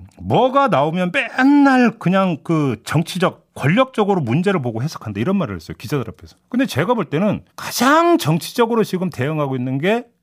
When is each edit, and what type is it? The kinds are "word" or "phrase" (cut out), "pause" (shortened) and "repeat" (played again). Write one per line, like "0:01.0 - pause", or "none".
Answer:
0:06.4 - pause
0:07.5 - pause